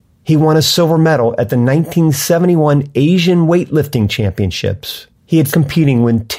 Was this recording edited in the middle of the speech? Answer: yes; 2 cuts; at 5.1 s, 5.5 s

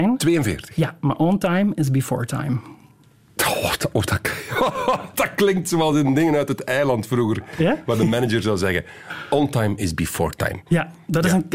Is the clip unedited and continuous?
yes; 0 cuts

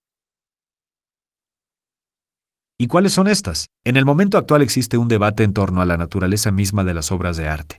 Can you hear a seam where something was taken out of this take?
yes; 1 cut; at 3.7 s

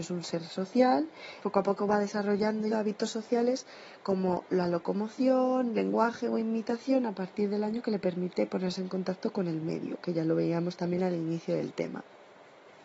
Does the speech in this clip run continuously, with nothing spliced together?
no; 2 cuts; at 1.4 s, 2.7 s

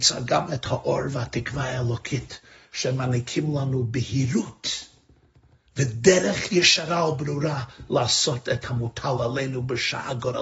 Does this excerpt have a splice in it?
no; 0 cuts

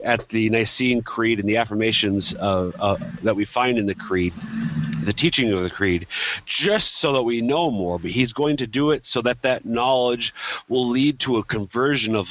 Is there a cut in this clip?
no; 0 cuts

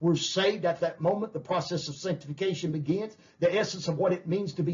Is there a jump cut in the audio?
no; 0 cuts

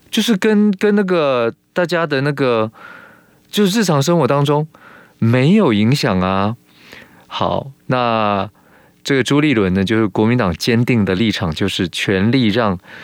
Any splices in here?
no; 0 cuts

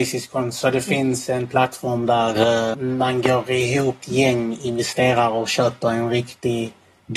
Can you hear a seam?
yes; 2 cuts; at 2.7 s, 4.0 s

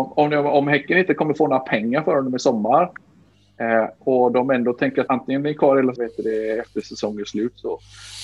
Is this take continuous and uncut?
no; 2 cuts; at 5.1 s, 6.0 s

